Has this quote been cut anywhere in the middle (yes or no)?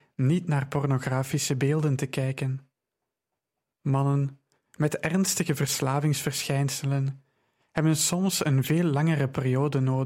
no